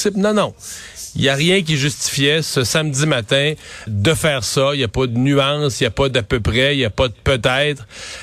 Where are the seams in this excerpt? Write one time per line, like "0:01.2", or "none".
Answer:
0:03.9